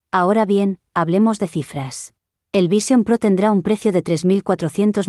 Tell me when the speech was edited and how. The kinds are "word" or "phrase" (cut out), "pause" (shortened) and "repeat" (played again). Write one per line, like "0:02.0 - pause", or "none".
0:02.4 - pause